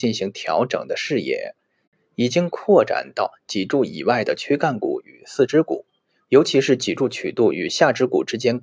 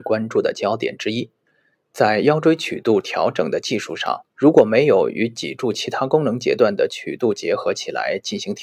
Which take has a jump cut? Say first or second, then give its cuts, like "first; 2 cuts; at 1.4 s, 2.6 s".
second; 2 cuts; at 1.4 s, 4.3 s